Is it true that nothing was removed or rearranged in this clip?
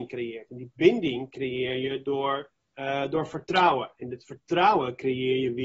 no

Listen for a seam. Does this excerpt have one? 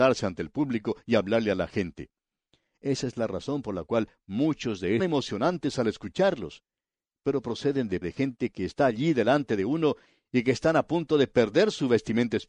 yes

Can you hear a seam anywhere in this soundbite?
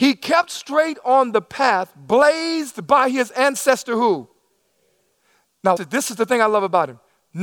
yes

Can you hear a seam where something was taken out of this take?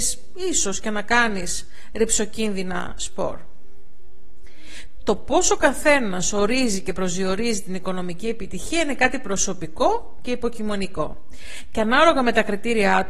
no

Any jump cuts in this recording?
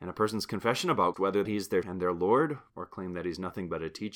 yes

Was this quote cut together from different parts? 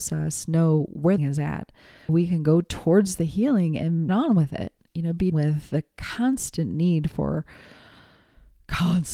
yes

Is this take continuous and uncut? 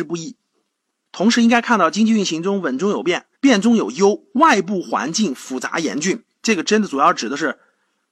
no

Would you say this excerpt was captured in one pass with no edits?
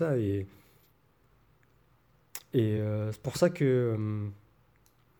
yes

